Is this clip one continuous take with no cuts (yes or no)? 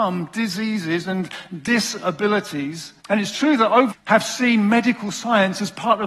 no